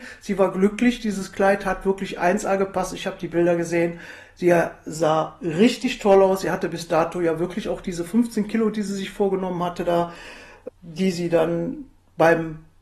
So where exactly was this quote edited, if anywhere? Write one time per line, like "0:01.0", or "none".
none